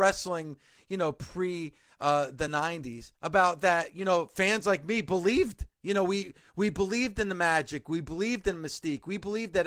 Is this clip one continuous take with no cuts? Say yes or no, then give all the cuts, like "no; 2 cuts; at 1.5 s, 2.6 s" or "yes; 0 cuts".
yes; 0 cuts